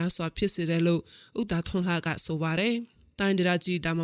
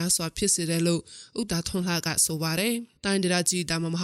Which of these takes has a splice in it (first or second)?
second